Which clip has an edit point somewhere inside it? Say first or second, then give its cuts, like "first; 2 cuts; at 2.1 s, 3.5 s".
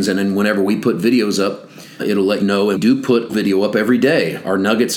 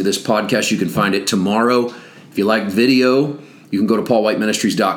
first; 4 cuts; at 2.0 s, 2.4 s, 2.8 s, 3.3 s